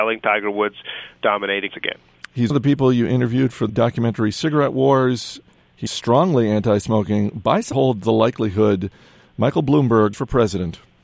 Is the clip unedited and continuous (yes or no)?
no